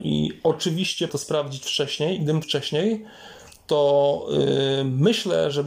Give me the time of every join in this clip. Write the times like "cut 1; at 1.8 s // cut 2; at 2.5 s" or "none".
cut 1; at 1.1 s // cut 2; at 2.4 s